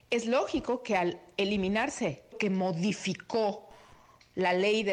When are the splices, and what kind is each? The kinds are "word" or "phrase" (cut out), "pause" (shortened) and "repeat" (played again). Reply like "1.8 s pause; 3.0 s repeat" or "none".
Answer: 2.3 s word